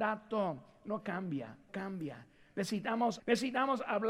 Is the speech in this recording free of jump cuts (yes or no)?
no